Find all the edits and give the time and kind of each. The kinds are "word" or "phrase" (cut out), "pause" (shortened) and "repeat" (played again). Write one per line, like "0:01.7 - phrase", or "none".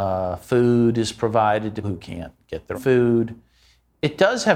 0:01.8 - word
0:02.7 - word